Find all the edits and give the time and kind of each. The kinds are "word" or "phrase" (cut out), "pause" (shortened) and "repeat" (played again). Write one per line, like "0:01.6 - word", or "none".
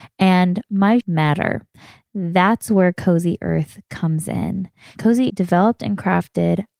0:01.0 - word
0:05.3 - word